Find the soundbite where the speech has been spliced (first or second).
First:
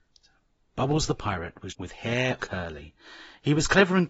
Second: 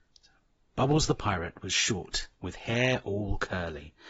first